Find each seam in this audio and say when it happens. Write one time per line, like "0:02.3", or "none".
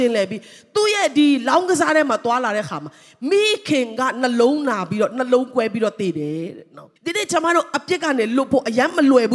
0:07.0